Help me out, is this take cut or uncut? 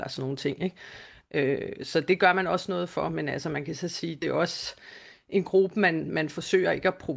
uncut